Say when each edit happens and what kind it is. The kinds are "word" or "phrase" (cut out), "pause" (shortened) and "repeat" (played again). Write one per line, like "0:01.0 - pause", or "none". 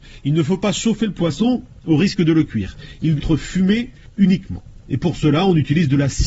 0:03.2 - word